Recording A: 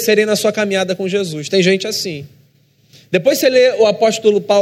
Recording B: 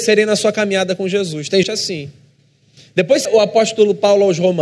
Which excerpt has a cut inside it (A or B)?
B